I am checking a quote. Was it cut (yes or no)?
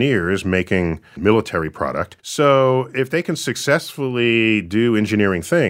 yes